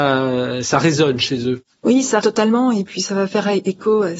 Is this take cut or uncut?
cut